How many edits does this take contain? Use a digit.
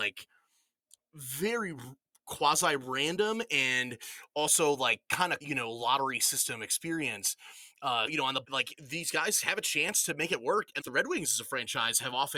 4